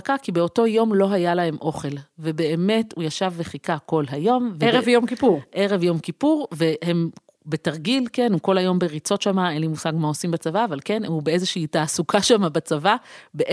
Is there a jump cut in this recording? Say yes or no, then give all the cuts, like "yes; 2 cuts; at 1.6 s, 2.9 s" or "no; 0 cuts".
no; 0 cuts